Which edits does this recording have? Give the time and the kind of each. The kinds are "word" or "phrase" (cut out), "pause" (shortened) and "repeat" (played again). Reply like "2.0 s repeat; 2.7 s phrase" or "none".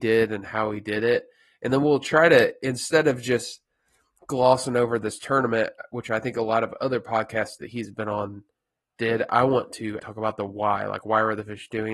10.0 s word